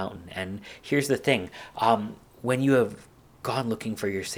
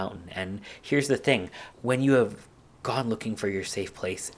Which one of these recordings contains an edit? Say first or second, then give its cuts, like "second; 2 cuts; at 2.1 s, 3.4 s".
second; 1 cut; at 1.7 s